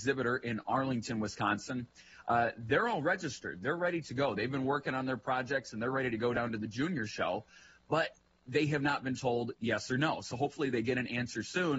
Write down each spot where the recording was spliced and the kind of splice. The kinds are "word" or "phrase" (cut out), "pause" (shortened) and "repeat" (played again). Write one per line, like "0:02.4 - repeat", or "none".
none